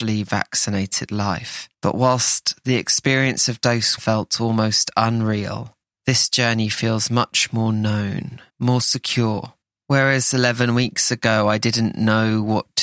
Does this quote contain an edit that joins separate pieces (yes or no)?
yes